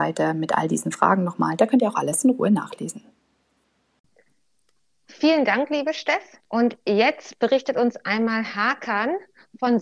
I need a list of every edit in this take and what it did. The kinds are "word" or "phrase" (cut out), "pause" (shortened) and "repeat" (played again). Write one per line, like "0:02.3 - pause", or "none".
0:06.5 - pause